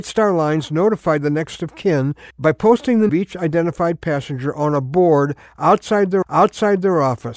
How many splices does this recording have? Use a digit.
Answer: 3